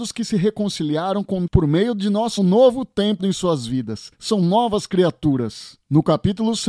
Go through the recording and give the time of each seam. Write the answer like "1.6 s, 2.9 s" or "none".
1.5 s, 2.4 s, 3.2 s